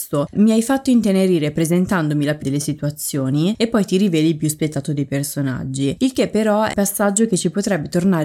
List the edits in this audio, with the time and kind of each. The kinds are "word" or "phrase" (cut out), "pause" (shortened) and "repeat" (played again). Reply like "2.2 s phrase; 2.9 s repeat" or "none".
2.4 s word; 6.7 s word